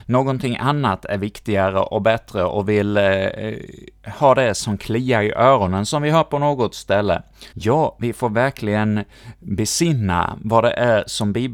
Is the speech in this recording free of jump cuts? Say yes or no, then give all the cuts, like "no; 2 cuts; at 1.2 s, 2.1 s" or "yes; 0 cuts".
no; 1 cut; at 7.5 s